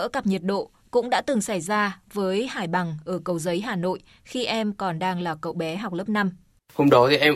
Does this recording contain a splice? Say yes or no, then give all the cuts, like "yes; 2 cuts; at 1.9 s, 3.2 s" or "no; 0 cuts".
no; 0 cuts